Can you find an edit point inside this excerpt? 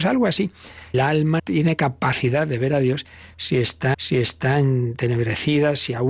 yes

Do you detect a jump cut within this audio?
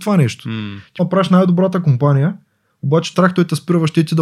yes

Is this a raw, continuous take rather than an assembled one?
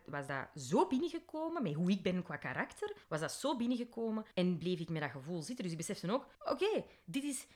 no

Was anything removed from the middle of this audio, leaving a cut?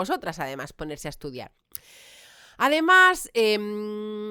no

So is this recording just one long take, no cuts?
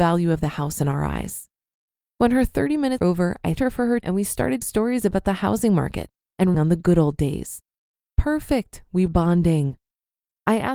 no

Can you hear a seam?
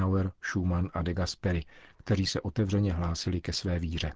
no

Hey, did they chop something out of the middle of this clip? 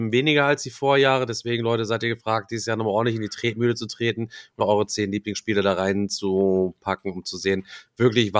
yes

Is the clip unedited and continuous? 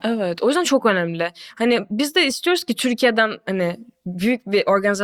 yes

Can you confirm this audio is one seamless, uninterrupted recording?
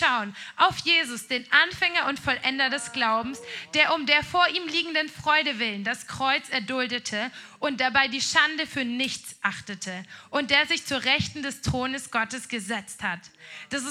yes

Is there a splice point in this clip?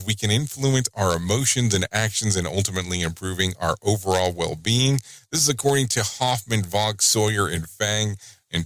no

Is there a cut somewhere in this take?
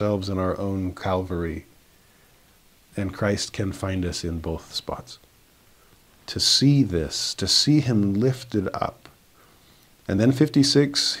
no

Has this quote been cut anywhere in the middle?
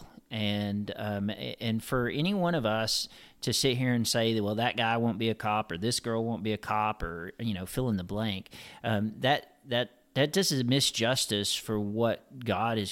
no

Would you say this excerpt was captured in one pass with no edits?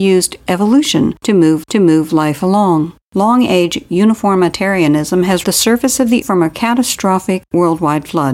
no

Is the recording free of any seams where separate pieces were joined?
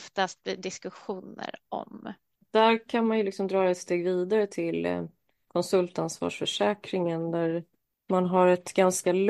yes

